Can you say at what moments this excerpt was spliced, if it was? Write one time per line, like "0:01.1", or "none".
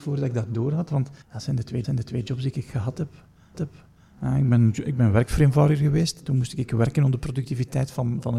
0:01.2
0:01.8
0:03.5